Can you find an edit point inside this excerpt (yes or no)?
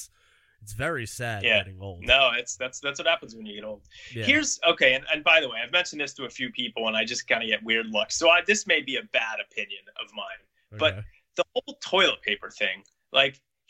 no